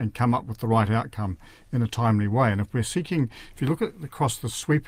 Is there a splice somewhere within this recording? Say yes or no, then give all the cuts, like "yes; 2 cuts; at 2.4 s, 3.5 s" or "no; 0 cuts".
no; 0 cuts